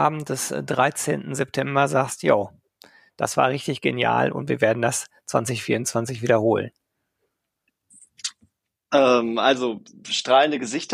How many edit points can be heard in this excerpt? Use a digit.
0